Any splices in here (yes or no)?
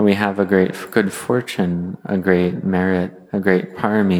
no